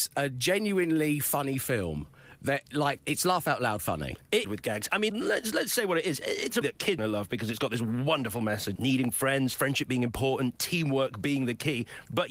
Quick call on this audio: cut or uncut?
cut